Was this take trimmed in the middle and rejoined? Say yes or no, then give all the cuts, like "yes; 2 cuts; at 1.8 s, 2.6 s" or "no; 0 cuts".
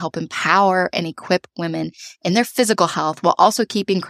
no; 0 cuts